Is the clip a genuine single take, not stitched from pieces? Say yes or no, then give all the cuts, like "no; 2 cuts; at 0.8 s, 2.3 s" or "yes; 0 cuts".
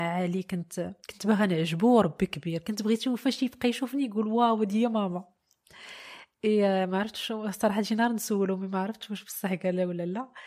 no; 1 cut; at 1.0 s